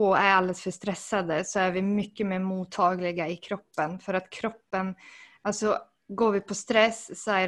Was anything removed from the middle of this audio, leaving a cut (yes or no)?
no